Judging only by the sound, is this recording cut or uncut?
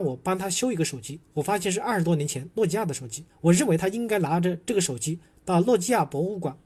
cut